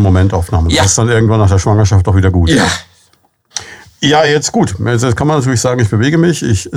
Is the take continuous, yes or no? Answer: yes